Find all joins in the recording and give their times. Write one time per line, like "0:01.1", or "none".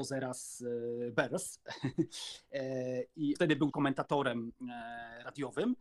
0:03.4
0:03.7